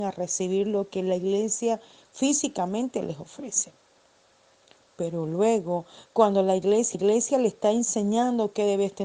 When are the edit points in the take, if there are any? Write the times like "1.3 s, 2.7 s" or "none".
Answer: 6.9 s